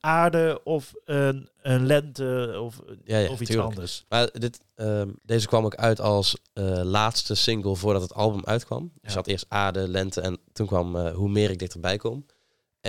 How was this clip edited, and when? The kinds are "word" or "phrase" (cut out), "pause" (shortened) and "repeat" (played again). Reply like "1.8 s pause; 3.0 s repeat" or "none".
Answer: 5.2 s pause